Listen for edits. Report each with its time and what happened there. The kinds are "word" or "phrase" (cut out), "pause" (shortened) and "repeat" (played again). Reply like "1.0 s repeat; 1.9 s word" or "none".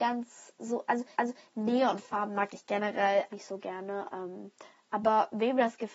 1.1 s repeat; 3.3 s word; 4.7 s pause

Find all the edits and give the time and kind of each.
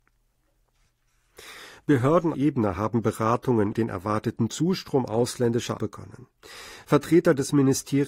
2.3 s phrase; 3.7 s word; 5.8 s word

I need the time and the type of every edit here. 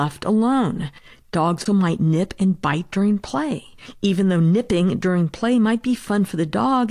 1.7 s word

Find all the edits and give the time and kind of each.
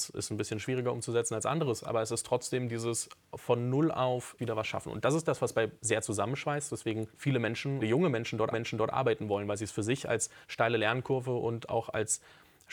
4.4 s word; 5.8 s phrase; 7.1 s pause; 7.8 s phrase; 8.5 s repeat; 10.4 s pause

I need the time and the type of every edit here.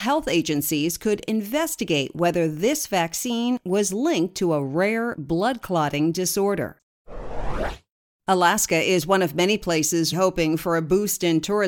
10.1 s word

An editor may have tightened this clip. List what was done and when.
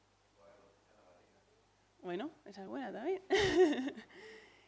2.7 s word

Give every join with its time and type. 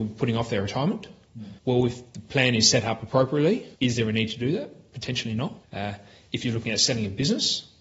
1.6 s pause; 3.8 s pause; 5.6 s pause

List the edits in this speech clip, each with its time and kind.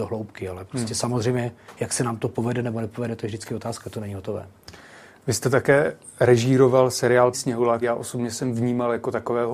3.8 s word; 7.3 s word; 7.8 s word

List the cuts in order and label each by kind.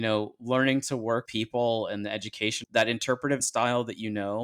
1.3 s word; 2.6 s word; 3.4 s word

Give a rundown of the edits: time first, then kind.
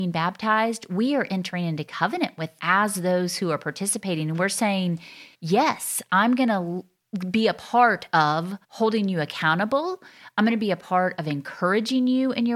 2.6 s word; 5.3 s pause; 8.6 s pause

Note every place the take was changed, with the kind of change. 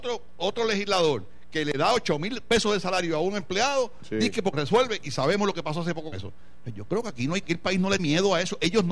4.5 s word; 6.1 s word; 7.4 s word; 8.0 s word

